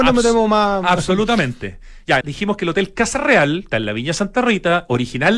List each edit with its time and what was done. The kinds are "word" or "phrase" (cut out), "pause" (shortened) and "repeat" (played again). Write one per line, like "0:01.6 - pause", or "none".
0:02.2 - word
0:03.7 - word